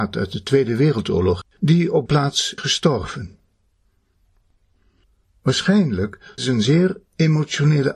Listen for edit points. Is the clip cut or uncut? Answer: cut